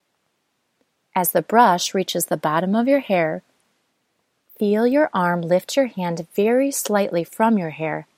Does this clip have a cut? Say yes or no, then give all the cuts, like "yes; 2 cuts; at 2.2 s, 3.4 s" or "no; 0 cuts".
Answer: no; 0 cuts